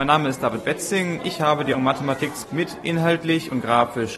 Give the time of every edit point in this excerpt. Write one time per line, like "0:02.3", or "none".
0:01.2
0:01.7
0:02.4